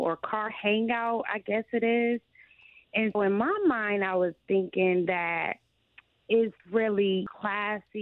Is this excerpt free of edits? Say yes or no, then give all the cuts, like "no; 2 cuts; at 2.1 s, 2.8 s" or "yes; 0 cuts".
no; 2 cuts; at 3.1 s, 6.6 s